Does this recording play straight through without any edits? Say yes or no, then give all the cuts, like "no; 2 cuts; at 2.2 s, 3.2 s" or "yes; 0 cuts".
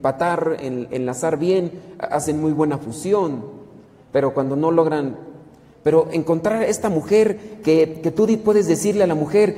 yes; 0 cuts